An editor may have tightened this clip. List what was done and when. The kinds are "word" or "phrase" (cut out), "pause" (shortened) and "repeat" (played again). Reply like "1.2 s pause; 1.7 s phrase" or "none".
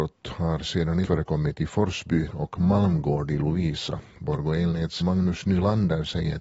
1.0 s word; 2.3 s word; 5.0 s word

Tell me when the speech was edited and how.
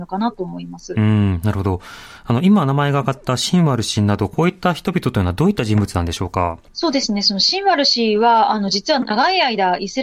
6.7 s pause

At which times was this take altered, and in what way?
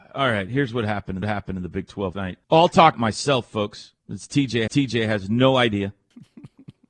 1.2 s repeat; 2.1 s word; 2.4 s pause; 2.9 s word; 4.0 s pause; 4.7 s repeat

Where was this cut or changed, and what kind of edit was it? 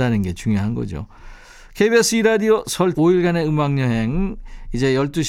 2.9 s word

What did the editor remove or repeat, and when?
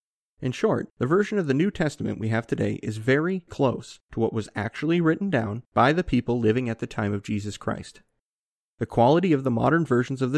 3.5 s word

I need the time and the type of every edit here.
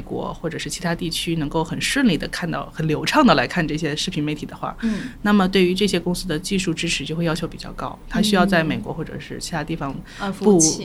none

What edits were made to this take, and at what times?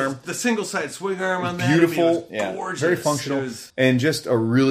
3.7 s pause

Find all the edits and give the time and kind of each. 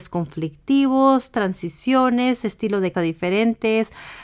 2.9 s word

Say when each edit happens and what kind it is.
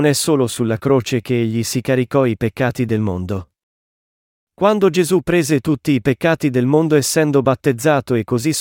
none

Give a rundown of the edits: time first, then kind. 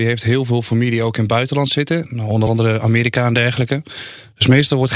none

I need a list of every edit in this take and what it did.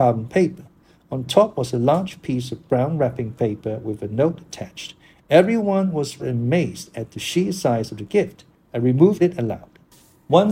6.2 s word; 9.2 s phrase

